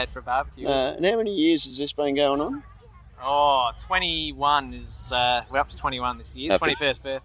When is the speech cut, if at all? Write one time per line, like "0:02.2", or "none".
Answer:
none